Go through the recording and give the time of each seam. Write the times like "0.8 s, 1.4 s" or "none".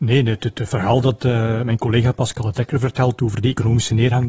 none